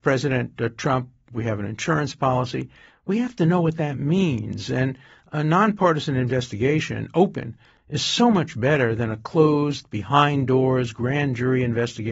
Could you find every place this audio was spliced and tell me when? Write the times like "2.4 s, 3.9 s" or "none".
none